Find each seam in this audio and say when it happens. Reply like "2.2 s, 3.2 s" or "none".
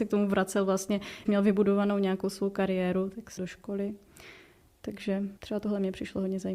1.3 s, 3.4 s, 5.4 s